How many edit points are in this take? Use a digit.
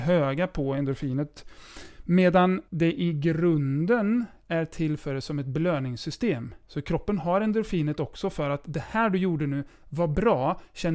1